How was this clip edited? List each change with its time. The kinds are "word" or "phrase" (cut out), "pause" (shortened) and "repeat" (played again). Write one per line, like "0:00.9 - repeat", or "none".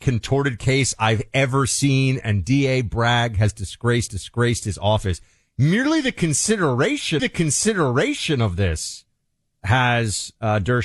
0:04.1 - repeat
0:07.2 - repeat

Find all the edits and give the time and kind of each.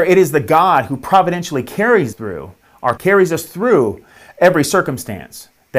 0:02.1 - word
0:03.0 - word

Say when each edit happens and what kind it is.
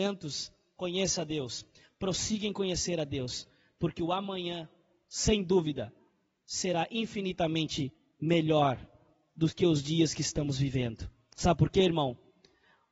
none

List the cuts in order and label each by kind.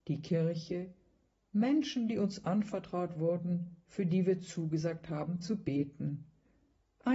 none

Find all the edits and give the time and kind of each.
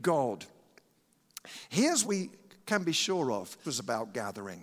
0:02.0 - word
0:03.6 - word

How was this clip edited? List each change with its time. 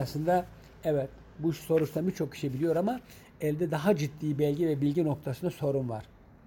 0:01.3 - pause

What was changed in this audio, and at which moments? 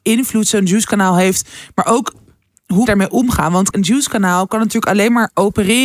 0:02.9 - word
0:03.7 - word

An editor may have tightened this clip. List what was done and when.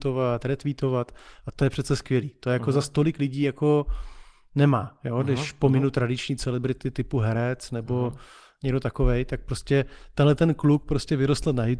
none

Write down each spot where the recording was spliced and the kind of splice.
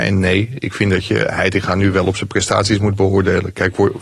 none

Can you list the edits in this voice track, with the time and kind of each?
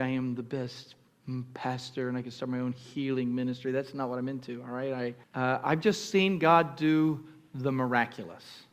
0:05.2 - pause

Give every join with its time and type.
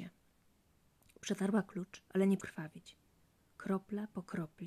0:02.1 - pause
0:02.4 - word

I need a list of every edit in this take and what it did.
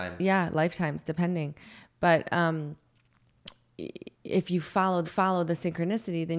0:04.1 - pause
0:05.0 - repeat

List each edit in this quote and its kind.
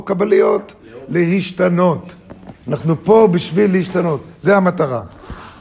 0:02.6 - pause

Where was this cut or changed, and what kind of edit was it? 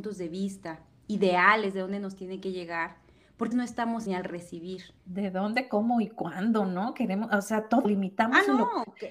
0:03.5 - word
0:04.1 - phrase
0:05.0 - pause
0:07.8 - word

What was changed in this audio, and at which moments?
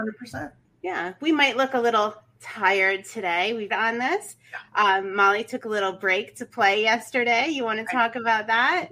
0:03.7 - phrase

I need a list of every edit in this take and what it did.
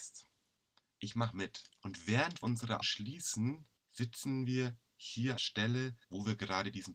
0:01.8 - pause
0:02.4 - word
0:02.8 - word
0:03.8 - pause
0:05.4 - phrase
0:06.0 - pause

